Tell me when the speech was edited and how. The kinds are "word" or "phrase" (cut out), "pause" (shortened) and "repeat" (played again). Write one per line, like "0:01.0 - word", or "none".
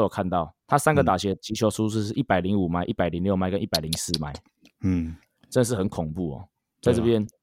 none